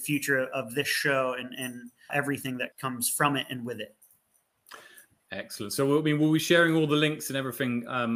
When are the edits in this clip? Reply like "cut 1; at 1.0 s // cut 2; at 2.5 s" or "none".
cut 1; at 2.1 s // cut 2; at 2.7 s